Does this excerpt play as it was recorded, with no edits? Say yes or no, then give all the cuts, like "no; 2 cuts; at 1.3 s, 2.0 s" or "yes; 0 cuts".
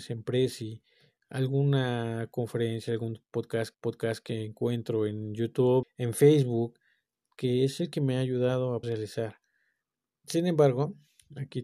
no; 3 cuts; at 3.7 s, 5.8 s, 8.8 s